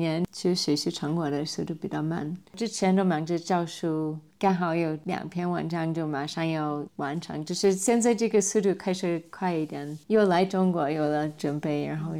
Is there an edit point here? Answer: yes; 1 cut; at 10.0 s

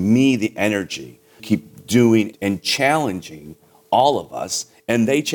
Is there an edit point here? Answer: yes; 2 cuts; at 1.4 s, 2.3 s

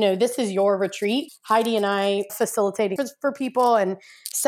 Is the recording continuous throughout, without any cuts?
no; 3 cuts; at 1.3 s, 2.3 s, 3.0 s

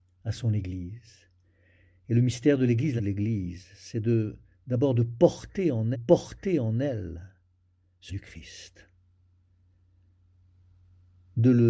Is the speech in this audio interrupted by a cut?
yes; 3 cuts; at 3.0 s, 5.9 s, 8.1 s

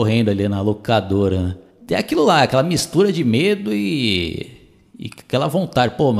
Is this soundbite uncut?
yes; 0 cuts

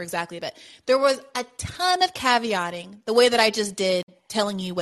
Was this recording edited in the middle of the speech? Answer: no; 0 cuts

